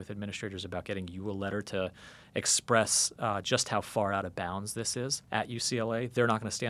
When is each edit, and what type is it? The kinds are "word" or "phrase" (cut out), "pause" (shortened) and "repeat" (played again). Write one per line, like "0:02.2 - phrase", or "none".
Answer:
0:05.2 - pause